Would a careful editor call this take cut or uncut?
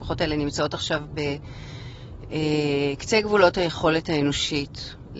uncut